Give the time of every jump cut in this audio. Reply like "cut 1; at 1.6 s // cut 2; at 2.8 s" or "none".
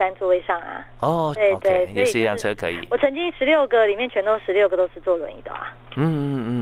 cut 1; at 1.3 s